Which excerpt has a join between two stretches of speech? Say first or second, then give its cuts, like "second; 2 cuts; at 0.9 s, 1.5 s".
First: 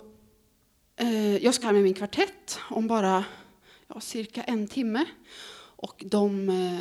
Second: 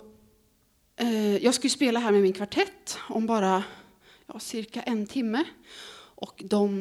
first; 1 cut; at 1.6 s